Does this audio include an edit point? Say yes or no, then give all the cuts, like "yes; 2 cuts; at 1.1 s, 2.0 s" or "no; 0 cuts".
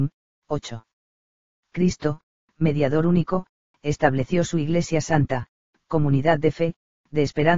no; 0 cuts